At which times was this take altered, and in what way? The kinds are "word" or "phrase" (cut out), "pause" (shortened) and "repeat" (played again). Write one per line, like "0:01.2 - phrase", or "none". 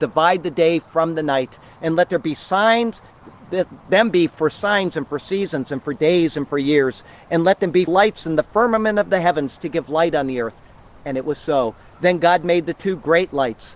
0:07.9 - word